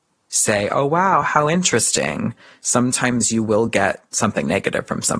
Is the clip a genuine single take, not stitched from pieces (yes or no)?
yes